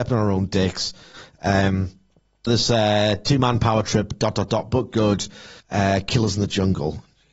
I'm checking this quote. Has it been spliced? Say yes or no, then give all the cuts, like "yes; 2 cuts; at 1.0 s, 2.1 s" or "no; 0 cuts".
yes; 2 cuts; at 2.5 s, 5.6 s